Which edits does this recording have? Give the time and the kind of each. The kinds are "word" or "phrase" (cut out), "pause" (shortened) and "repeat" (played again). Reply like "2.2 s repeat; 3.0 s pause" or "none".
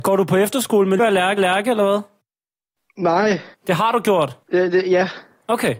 1.0 s word; 1.4 s repeat; 3.5 s pause; 4.4 s pause